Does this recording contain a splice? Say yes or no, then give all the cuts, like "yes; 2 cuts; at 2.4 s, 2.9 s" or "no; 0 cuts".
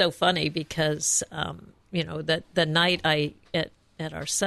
no; 0 cuts